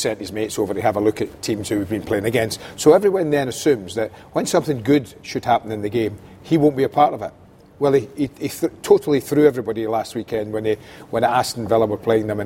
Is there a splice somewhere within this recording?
no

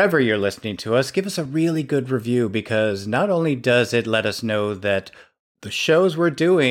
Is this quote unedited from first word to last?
yes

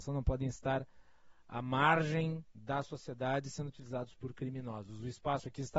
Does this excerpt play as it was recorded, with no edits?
yes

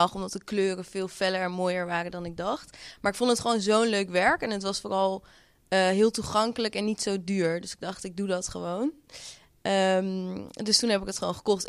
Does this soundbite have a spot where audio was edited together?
no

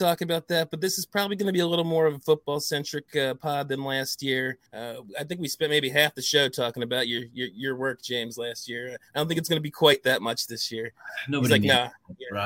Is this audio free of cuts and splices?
no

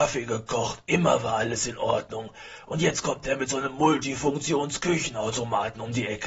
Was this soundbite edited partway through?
no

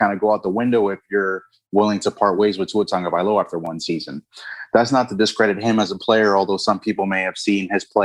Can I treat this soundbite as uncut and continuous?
yes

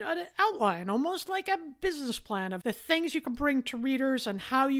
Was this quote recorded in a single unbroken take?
yes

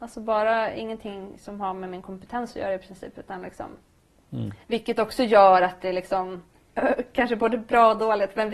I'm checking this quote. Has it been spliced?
yes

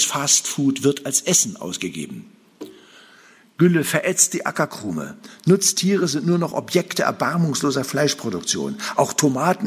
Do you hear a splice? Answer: no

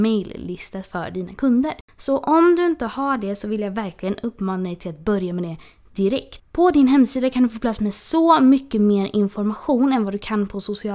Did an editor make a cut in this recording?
yes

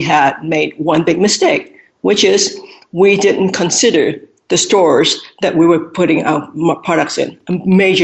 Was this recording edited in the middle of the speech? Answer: no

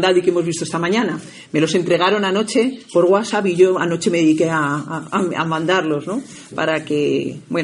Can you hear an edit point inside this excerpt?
no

